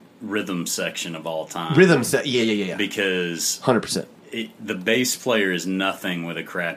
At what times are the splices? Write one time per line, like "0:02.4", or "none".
none